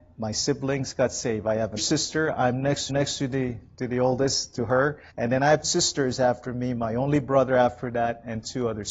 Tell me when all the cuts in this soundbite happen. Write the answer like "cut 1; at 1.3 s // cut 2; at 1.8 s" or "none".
cut 1; at 1.8 s // cut 2; at 2.9 s // cut 3; at 5.1 s // cut 4; at 5.6 s